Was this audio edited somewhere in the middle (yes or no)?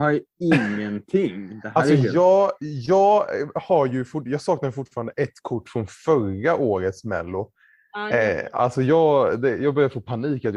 no